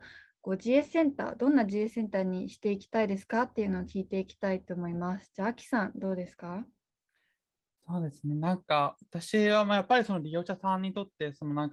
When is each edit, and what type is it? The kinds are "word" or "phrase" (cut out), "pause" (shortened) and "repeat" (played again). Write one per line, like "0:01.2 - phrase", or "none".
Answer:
none